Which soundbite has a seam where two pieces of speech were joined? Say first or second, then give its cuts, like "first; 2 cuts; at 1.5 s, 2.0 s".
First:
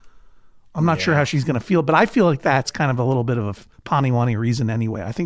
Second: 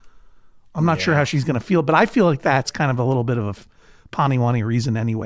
first; 1 cut; at 3.7 s